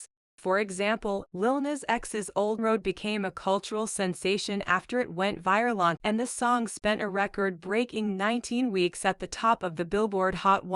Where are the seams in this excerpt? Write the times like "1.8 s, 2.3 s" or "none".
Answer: 2.6 s, 6.0 s